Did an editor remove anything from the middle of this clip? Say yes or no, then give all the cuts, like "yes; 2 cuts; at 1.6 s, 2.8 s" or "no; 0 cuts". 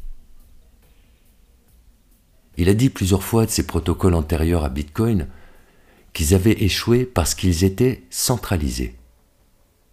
no; 0 cuts